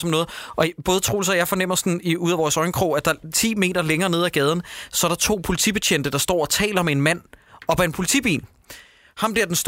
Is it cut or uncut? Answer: uncut